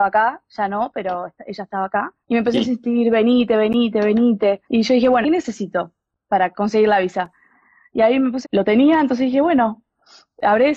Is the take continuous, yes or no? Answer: no